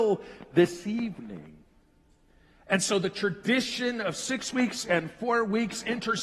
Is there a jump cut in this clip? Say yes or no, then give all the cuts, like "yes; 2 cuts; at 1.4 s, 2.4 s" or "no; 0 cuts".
no; 0 cuts